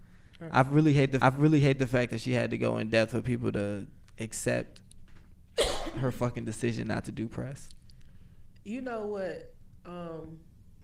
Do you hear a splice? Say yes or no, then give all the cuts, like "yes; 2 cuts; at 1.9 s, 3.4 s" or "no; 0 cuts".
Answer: yes; 1 cut; at 1.2 s